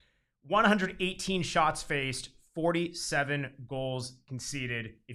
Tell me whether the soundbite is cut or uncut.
uncut